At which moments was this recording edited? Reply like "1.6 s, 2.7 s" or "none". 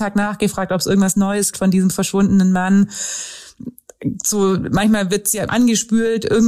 1.5 s, 5.5 s

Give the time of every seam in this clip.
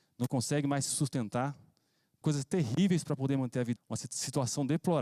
2.2 s, 3.8 s

